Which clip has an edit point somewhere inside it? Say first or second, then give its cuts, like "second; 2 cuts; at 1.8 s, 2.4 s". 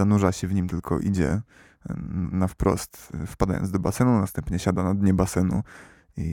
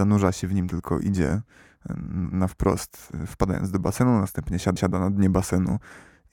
second; 1 cut; at 4.8 s